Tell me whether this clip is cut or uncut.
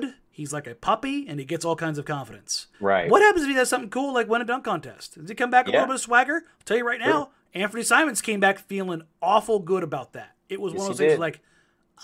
cut